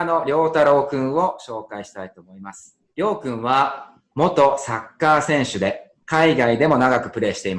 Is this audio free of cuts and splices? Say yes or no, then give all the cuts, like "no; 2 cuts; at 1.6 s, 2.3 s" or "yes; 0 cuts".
no; 2 cuts; at 2.8 s, 6.0 s